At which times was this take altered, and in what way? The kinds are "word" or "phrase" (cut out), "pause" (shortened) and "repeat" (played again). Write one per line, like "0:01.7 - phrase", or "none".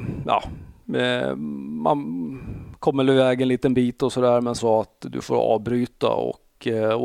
0:04.6 - phrase